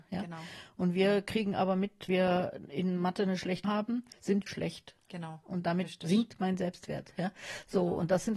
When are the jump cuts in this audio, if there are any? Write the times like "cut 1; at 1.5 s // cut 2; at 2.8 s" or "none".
cut 1; at 2.1 s // cut 2; at 3.6 s // cut 3; at 4.5 s